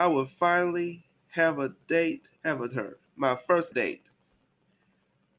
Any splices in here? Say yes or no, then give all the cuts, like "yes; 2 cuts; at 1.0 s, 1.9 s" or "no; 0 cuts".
yes; 4 cuts; at 2.4 s, 2.7 s, 3.1 s, 3.7 s